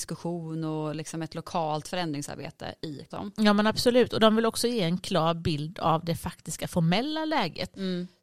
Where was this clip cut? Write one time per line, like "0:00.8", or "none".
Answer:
0:01.8
0:03.1